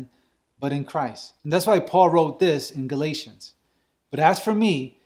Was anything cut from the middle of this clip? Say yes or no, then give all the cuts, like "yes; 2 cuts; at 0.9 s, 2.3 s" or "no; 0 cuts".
yes; 1 cut; at 1.4 s